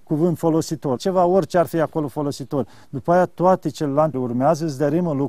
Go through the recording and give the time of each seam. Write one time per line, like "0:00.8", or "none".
0:01.0
0:04.1